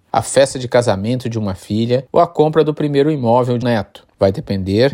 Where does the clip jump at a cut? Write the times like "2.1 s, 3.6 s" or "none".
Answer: 3.6 s